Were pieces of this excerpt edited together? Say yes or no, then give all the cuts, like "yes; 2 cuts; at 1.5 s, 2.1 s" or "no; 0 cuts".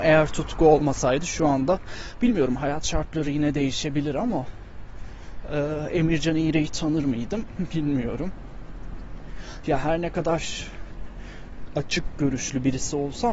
no; 0 cuts